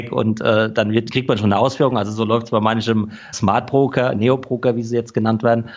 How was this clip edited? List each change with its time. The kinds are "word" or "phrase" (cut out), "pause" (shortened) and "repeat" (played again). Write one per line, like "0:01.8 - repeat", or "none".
0:03.3 - word